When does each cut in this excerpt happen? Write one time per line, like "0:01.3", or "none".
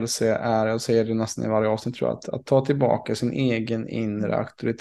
none